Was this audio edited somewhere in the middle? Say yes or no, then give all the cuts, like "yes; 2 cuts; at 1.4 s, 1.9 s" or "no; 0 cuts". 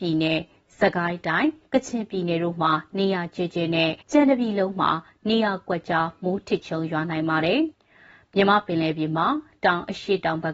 yes; 2 cuts; at 4.0 s, 7.7 s